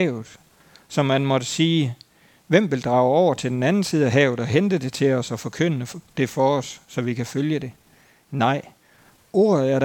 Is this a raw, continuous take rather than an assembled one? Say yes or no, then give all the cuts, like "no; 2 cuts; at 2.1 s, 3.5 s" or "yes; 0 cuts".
yes; 0 cuts